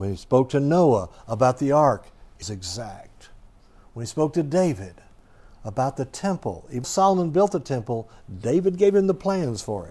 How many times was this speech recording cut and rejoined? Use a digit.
2